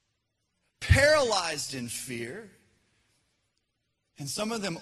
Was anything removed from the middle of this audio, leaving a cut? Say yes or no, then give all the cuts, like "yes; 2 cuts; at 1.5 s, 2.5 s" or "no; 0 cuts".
no; 0 cuts